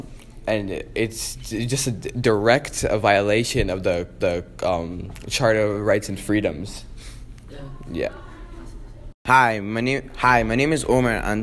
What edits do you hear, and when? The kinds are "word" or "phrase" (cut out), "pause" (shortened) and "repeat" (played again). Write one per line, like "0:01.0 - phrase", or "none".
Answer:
0:04.2 - repeat